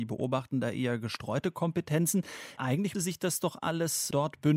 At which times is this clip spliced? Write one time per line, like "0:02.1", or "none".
0:02.9